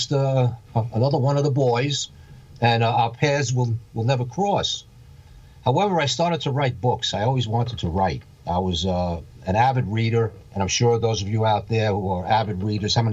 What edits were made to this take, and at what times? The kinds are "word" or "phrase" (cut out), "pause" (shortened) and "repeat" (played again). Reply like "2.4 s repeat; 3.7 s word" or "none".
10.5 s pause